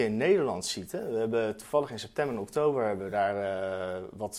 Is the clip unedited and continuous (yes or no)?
yes